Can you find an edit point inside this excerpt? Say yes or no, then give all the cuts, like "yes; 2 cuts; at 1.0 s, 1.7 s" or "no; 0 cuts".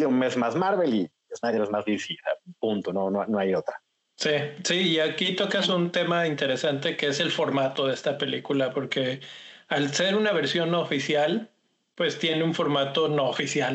no; 0 cuts